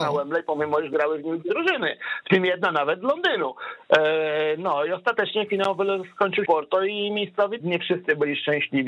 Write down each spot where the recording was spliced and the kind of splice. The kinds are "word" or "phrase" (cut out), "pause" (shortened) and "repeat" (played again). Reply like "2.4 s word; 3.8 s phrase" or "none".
1.5 s word; 6.4 s phrase; 7.6 s word